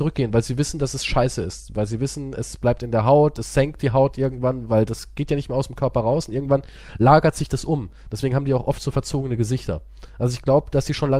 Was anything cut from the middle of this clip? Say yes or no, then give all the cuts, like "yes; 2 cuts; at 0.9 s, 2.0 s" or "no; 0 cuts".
no; 0 cuts